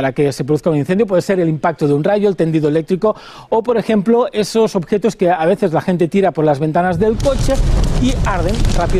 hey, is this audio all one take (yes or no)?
yes